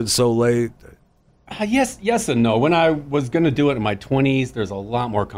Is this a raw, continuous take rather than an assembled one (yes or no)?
yes